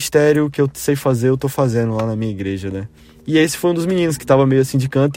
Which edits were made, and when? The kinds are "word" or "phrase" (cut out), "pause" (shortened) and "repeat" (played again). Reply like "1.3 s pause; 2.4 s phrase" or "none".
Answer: none